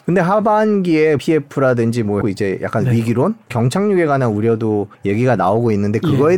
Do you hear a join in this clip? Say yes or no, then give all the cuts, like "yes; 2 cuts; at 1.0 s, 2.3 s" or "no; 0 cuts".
yes; 4 cuts; at 1.2 s, 2.2 s, 3.5 s, 4.9 s